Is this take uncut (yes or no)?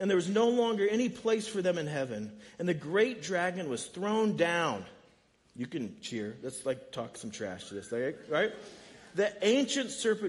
yes